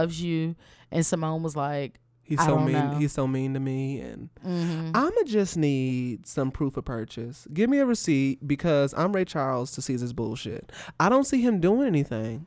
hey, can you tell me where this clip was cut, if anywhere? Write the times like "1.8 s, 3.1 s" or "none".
none